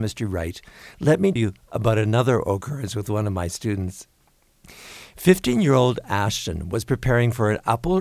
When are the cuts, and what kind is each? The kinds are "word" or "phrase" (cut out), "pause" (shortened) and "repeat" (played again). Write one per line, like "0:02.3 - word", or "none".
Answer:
0:01.4 - word